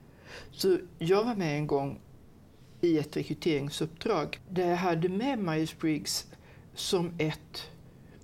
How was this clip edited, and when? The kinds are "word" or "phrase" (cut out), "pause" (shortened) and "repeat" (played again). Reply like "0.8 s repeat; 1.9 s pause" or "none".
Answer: none